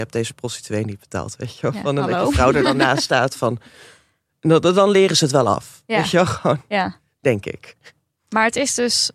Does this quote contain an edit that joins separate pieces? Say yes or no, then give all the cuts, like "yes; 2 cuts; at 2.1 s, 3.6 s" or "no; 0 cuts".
no; 0 cuts